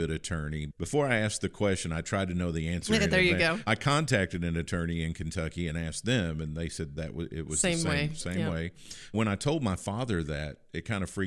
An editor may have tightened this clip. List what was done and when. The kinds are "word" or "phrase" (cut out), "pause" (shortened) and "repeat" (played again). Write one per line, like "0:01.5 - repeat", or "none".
0:03.7 - word
0:09.1 - word